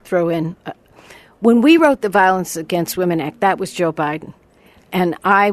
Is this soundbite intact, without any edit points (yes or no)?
yes